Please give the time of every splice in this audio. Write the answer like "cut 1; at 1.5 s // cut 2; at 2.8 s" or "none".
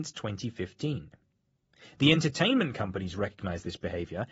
none